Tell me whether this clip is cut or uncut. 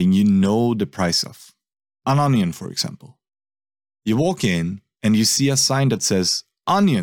uncut